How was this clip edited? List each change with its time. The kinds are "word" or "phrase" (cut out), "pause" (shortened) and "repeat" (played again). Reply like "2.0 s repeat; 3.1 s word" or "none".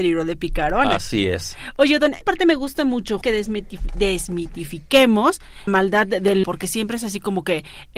2.2 s word; 3.2 s word; 5.7 s word; 6.4 s word